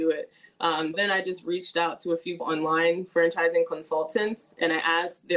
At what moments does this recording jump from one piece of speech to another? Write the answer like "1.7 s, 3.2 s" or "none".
0.9 s, 2.4 s